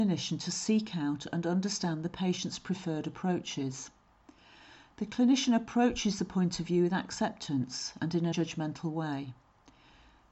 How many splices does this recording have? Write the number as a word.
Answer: one